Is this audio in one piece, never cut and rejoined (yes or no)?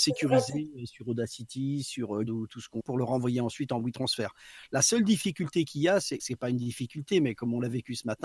no